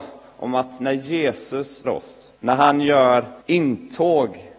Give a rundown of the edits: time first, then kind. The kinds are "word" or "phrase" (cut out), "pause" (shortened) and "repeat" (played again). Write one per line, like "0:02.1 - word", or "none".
0:01.8 - word
0:02.4 - pause
0:03.4 - pause